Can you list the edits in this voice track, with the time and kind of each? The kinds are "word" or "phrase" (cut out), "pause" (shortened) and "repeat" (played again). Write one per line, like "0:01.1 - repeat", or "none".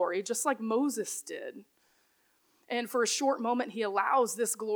none